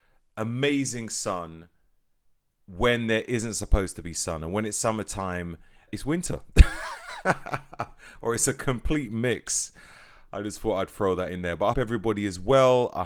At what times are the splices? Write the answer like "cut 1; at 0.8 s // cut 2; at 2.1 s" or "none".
cut 1; at 5.9 s // cut 2; at 11.7 s